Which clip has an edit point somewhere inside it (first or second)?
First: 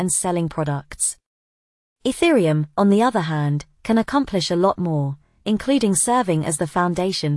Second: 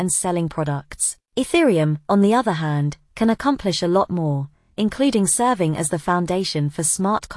second